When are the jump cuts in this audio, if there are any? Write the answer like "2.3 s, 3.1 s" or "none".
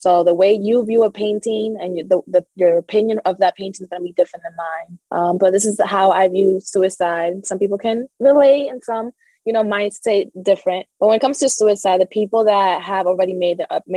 5.0 s, 8.1 s, 10.9 s